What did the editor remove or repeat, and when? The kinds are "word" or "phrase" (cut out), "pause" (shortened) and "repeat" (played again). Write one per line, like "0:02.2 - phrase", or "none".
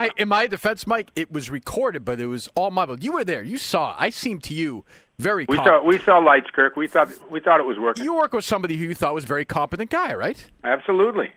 none